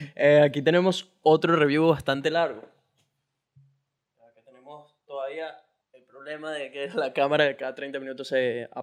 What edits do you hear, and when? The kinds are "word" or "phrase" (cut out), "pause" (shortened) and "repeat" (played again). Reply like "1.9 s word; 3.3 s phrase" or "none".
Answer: 5.8 s pause